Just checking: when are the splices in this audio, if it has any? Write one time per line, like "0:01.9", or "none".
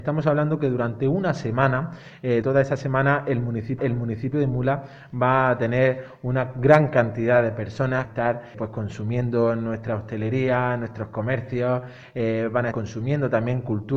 0:02.4
0:03.8
0:08.0
0:08.5
0:12.7